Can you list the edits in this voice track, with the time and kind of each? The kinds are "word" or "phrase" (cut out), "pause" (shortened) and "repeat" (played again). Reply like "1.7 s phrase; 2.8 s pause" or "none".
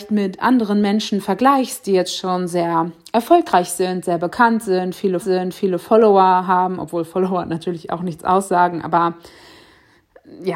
5.2 s repeat